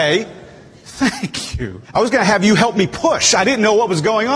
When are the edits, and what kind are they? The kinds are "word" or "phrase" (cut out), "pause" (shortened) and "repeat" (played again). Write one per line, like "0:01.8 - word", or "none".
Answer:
0:01.8 - pause